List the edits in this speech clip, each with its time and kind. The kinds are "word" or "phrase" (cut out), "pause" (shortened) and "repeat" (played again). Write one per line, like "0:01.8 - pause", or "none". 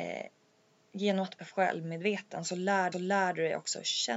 0:01.4 - phrase
0:02.9 - repeat